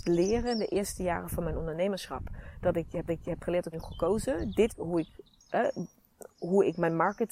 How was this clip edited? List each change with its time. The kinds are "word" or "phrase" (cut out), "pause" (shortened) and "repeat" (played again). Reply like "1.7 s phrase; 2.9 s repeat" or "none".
3.1 s repeat; 3.7 s phrase; 4.7 s phrase; 6.3 s pause